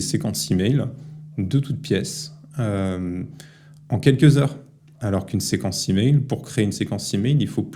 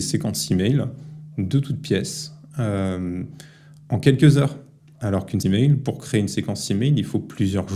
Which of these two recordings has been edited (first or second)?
second